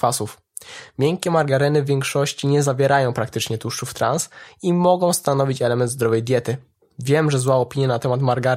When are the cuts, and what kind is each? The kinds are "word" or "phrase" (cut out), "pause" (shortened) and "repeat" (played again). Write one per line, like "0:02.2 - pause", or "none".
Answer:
none